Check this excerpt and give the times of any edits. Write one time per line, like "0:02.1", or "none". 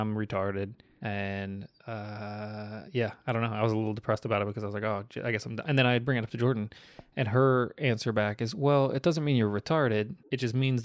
none